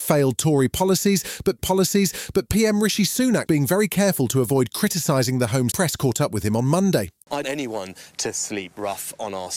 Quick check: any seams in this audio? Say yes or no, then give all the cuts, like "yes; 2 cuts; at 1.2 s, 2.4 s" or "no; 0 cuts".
yes; 4 cuts; at 1.6 s, 3.5 s, 5.7 s, 7.4 s